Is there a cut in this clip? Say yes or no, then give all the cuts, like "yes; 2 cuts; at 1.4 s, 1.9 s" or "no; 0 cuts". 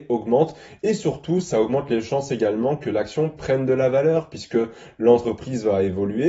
no; 0 cuts